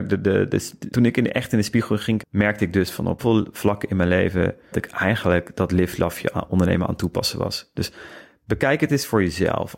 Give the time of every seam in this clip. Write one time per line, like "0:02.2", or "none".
0:00.9
0:02.2
0:03.2
0:04.7